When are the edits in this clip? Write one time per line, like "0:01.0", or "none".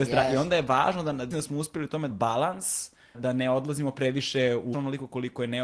0:01.3
0:02.1
0:03.1
0:04.7